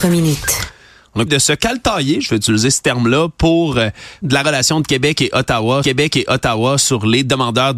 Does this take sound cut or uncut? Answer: cut